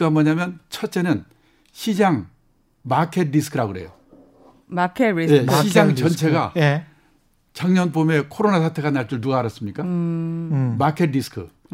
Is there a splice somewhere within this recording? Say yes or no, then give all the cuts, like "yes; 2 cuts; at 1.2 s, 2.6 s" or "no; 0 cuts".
no; 0 cuts